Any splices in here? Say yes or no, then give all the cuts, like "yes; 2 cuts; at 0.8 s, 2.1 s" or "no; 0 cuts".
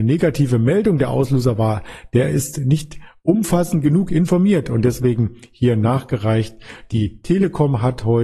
no; 0 cuts